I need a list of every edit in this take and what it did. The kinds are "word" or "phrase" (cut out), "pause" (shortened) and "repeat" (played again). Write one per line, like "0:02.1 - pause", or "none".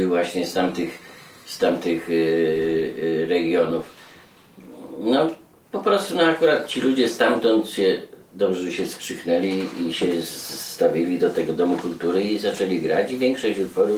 none